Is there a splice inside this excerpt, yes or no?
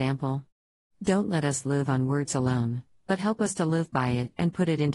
no